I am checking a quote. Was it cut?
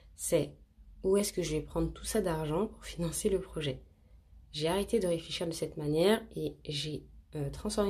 yes; 1 cut; at 4.4 s

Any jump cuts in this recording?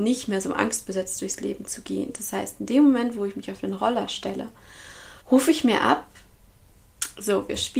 yes; 1 cut; at 5.2 s

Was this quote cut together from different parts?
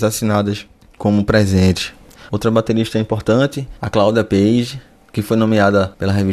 no; 0 cuts

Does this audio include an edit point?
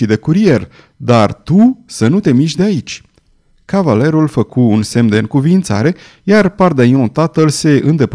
no; 0 cuts

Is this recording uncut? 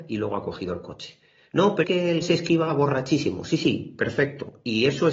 no; 2 cuts; at 1.8 s, 2.2 s

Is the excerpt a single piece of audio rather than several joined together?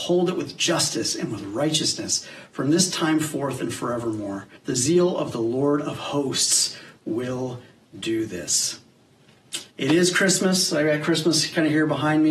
no; 2 cuts; at 4.6 s, 9.7 s

